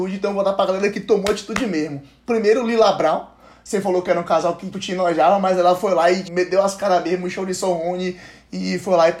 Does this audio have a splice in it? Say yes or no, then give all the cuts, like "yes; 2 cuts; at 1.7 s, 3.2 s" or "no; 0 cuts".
yes; 2 cuts; at 4.7 s, 6.2 s